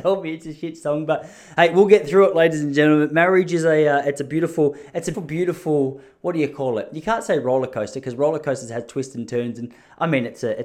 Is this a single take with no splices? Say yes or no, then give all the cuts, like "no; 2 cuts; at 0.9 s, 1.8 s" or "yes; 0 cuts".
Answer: no; 1 cut; at 5.1 s